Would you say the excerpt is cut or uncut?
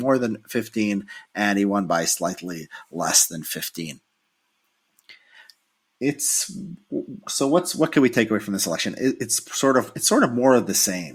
uncut